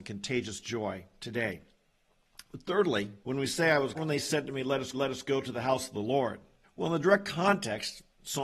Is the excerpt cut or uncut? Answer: cut